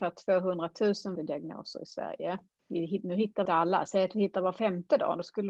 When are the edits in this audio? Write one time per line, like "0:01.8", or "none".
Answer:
0:01.2
0:02.6
0:03.5